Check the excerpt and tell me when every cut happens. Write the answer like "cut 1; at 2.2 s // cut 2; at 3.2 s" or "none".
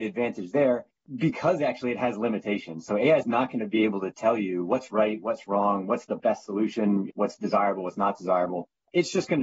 none